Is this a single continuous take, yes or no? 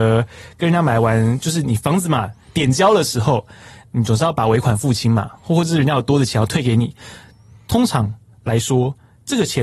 yes